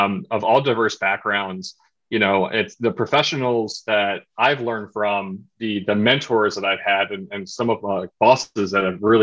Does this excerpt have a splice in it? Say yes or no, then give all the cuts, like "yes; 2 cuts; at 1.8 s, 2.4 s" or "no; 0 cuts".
no; 0 cuts